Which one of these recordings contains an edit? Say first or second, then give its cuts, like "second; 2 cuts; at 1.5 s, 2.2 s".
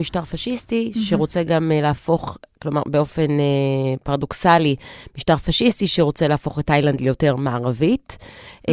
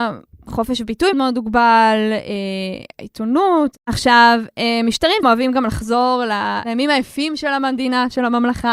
second; 2 cuts; at 1.1 s, 5.2 s